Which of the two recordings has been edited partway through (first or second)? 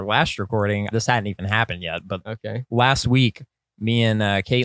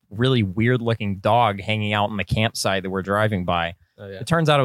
first